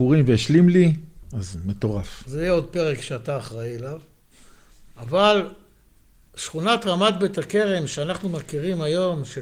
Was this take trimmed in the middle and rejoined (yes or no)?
no